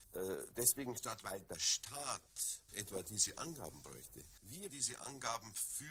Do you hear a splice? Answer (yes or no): yes